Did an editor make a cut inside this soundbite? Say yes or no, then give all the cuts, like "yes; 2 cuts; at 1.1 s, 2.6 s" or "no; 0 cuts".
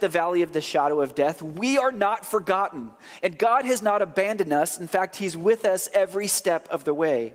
no; 0 cuts